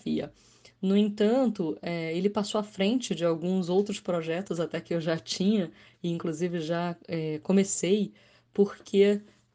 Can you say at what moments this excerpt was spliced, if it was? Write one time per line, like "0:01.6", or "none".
0:07.0